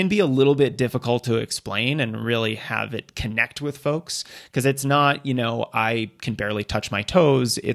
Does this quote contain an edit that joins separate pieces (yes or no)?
no